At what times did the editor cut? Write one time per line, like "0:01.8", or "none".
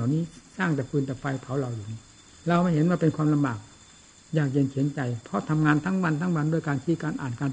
none